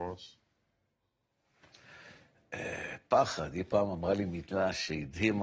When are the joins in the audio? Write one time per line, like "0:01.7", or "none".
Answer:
none